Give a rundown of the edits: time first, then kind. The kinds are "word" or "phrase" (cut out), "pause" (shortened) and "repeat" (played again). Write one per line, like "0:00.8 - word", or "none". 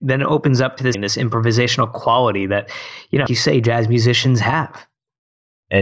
0:00.9 - word
0:03.3 - word